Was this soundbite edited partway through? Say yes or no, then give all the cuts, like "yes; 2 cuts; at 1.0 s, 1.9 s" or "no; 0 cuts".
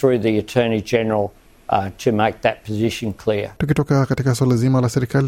no; 0 cuts